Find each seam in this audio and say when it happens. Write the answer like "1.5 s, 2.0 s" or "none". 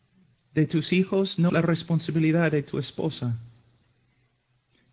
1.5 s